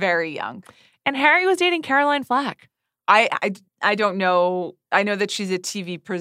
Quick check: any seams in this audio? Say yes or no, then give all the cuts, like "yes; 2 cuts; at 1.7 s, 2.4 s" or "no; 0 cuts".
yes; 1 cut; at 3.6 s